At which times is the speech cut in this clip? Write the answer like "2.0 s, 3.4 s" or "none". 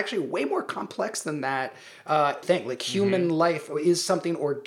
2.4 s